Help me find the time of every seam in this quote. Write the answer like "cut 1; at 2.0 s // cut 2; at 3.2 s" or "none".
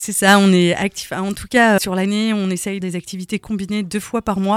cut 1; at 1.8 s // cut 2; at 2.8 s